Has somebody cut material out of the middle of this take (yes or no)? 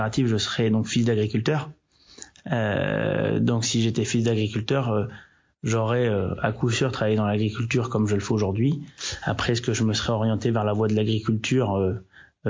no